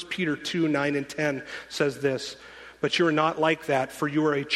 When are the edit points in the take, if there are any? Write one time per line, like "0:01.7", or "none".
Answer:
none